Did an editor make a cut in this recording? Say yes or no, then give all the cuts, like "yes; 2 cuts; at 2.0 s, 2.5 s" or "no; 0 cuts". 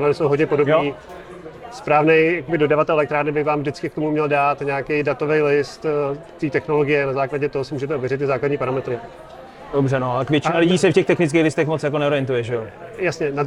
no; 0 cuts